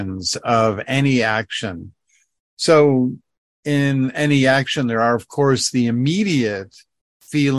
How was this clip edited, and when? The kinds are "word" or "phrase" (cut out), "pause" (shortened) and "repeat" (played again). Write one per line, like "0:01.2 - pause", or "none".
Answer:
none